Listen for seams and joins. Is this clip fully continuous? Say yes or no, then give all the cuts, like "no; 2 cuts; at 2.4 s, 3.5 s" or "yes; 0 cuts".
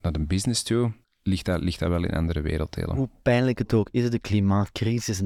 no; 1 cut; at 1.0 s